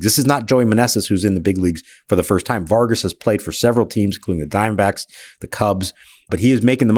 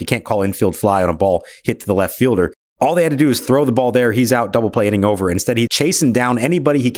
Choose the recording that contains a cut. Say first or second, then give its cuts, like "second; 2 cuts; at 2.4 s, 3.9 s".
second; 1 cut; at 5.7 s